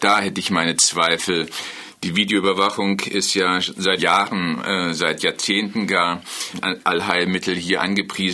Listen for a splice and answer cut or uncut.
cut